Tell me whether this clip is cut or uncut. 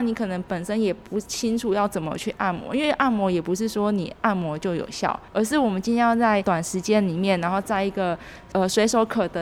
cut